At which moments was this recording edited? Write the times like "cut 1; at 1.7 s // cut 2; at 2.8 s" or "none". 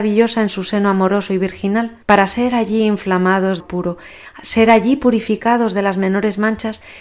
cut 1; at 2.0 s // cut 2; at 3.6 s

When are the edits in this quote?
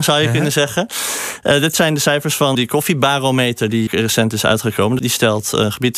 cut 1; at 2.5 s // cut 2; at 3.9 s // cut 3; at 5.0 s

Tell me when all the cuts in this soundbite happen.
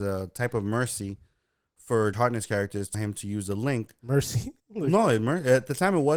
cut 1; at 2.1 s // cut 2; at 2.9 s // cut 3; at 4.6 s

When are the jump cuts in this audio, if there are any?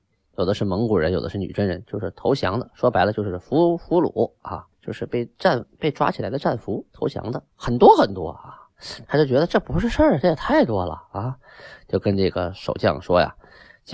cut 1; at 4.7 s // cut 2; at 6.9 s

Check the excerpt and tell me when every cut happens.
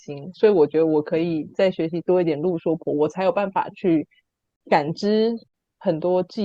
none

